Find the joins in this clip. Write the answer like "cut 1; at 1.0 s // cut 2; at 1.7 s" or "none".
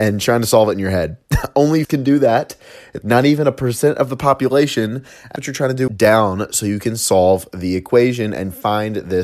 cut 1; at 1.2 s // cut 2; at 1.8 s // cut 3; at 3.0 s // cut 4; at 5.4 s // cut 5; at 5.9 s